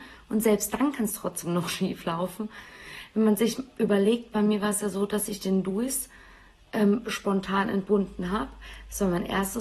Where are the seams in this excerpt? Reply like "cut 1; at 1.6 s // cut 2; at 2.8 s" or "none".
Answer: none